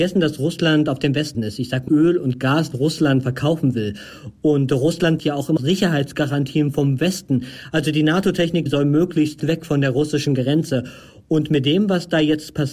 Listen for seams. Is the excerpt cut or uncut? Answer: cut